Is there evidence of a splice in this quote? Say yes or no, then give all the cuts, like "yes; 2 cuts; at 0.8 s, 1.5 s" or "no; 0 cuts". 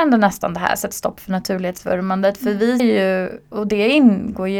yes; 1 cut; at 2.8 s